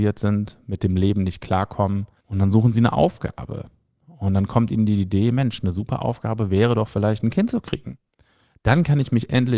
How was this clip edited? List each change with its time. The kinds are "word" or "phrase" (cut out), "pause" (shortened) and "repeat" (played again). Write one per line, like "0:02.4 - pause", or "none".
none